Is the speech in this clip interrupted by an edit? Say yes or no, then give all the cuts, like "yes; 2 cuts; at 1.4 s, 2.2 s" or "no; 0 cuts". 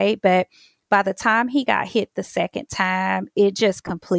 no; 0 cuts